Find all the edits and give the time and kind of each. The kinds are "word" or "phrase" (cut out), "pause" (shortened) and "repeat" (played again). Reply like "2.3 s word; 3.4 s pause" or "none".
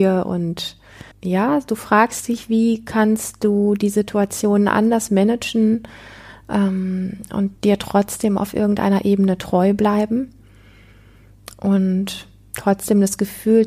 1.1 s pause; 7.6 s pause